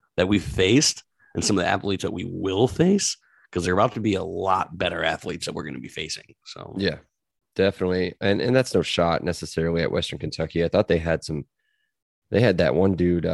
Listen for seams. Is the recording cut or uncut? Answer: uncut